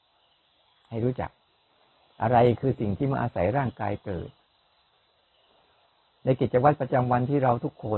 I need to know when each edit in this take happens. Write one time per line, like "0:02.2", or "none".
none